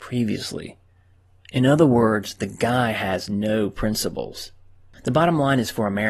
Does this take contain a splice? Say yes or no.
no